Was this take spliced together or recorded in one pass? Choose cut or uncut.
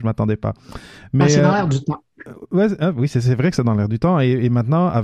uncut